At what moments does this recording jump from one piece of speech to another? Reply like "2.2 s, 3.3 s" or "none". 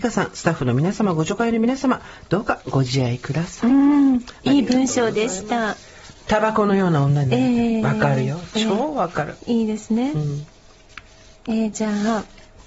11.7 s